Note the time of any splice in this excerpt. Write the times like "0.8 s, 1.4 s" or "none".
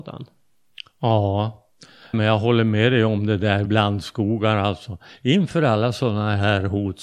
2.1 s, 3.7 s